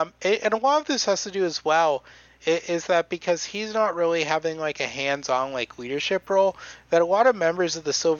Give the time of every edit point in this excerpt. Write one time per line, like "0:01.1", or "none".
none